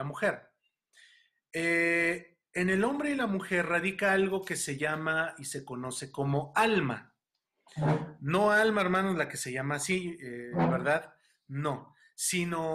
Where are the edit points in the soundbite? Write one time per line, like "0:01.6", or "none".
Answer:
none

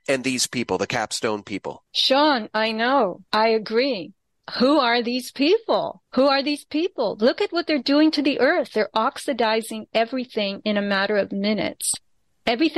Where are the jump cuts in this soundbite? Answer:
0:01.9
0:03.3
0:06.1

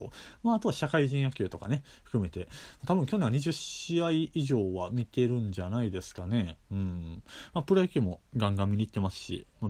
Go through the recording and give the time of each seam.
0:08.3

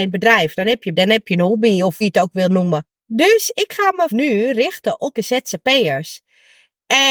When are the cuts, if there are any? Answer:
0:00.9
0:02.0
0:03.0
0:04.1
0:05.1

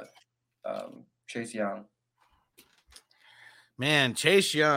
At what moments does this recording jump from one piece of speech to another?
none

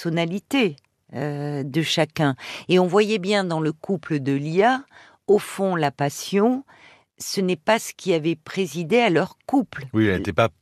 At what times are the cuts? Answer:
none

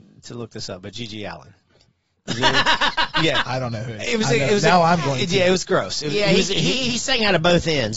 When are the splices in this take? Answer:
none

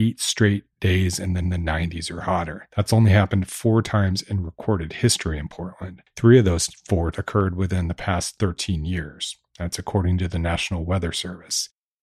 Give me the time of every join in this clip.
0:01.4
0:07.1

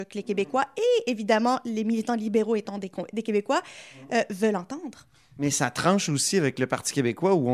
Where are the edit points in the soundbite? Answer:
none

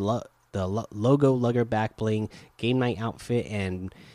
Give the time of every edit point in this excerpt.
none

